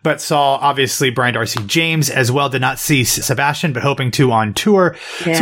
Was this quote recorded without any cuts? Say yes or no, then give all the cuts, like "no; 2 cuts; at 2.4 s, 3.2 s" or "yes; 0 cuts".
no; 1 cut; at 3.2 s